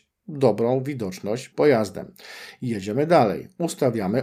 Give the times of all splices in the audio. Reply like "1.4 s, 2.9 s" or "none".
1.5 s